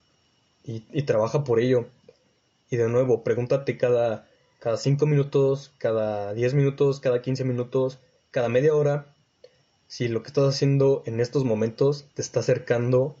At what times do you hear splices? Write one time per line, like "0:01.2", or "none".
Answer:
none